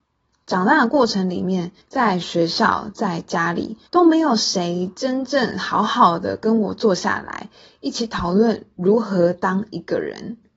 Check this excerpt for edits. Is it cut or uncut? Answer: cut